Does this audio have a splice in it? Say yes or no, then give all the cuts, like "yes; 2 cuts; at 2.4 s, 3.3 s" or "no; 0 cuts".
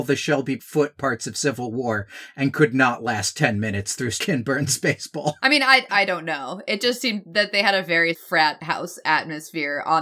yes; 1 cut; at 5.9 s